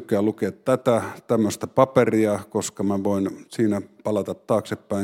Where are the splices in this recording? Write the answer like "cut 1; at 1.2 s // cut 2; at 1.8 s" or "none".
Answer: none